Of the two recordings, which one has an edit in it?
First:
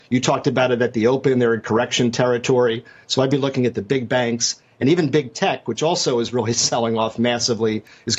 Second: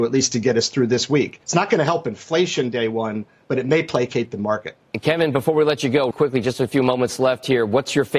second; 2 cuts; at 1.4 s, 6.1 s

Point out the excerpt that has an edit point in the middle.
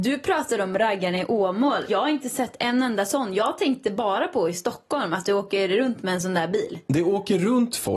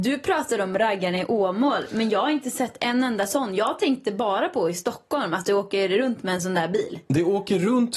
first; 1 cut; at 1.9 s

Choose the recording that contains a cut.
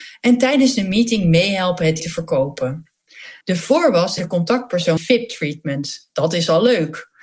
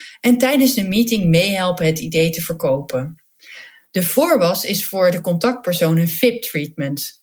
first; 4 cuts; at 2.0 s, 3.4 s, 4.2 s, 5.0 s

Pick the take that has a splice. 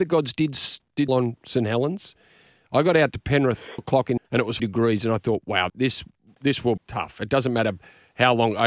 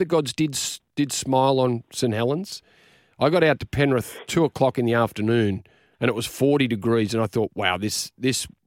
first; 6 cuts; at 1.1 s, 3.8 s, 4.2 s, 4.6 s, 5.7 s, 6.8 s

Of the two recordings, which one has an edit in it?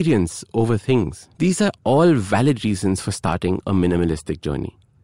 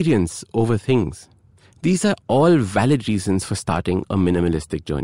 first; 1 cut; at 1.3 s

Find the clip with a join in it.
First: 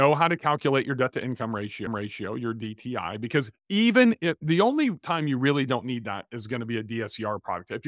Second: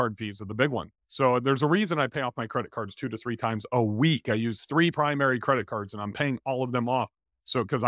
first; 2 cuts; at 1.9 s, 3.6 s

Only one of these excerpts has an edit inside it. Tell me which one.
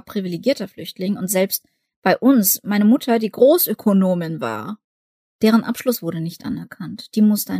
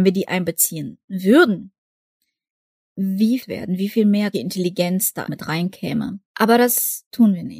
second; 4 cuts; at 3.4 s, 4.3 s, 5.3 s, 6.2 s

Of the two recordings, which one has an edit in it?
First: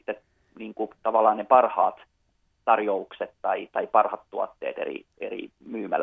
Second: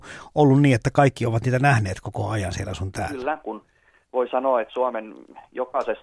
second; 1 cut; at 3.4 s

